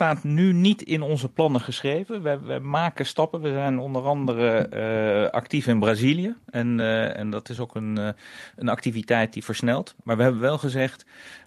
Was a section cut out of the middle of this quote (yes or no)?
no